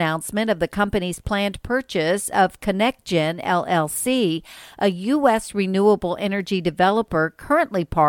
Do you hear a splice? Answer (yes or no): no